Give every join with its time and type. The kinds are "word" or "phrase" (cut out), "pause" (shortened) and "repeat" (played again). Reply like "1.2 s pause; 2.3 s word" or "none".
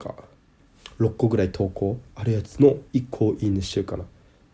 2.1 s pause; 2.9 s pause